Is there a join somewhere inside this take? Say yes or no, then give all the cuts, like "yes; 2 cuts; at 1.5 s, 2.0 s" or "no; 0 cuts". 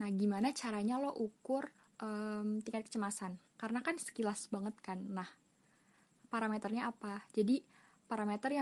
yes; 2 cuts; at 1.8 s, 3.5 s